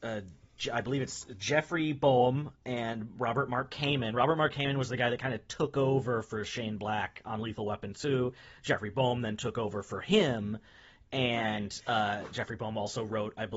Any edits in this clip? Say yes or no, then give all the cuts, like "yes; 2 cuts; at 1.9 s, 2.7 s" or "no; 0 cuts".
no; 0 cuts